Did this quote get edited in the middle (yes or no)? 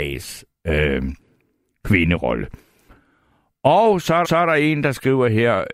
yes